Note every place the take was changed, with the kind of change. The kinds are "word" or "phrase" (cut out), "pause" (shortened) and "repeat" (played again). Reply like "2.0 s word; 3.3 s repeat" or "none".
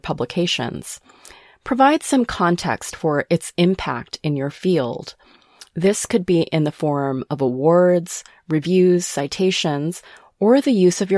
none